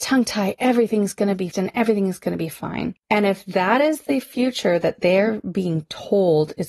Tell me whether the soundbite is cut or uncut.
cut